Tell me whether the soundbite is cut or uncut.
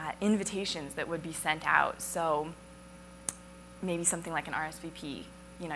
uncut